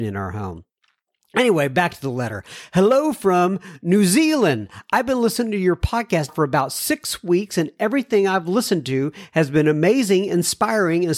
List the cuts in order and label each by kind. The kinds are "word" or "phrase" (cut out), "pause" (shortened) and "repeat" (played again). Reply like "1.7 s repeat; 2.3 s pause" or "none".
6.3 s word